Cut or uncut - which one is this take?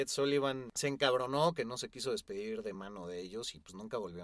uncut